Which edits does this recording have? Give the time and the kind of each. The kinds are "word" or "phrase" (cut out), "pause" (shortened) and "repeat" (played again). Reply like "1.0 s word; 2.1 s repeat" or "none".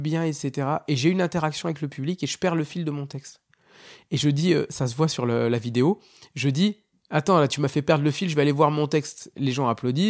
none